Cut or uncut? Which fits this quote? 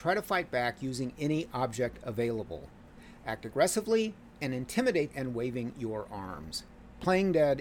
cut